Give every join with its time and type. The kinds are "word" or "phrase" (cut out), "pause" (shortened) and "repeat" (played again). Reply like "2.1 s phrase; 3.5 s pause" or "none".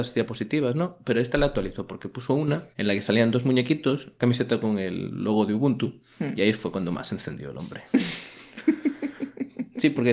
2.7 s pause; 4.2 s phrase